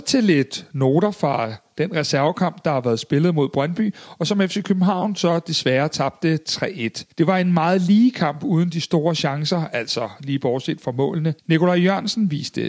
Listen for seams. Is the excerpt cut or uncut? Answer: cut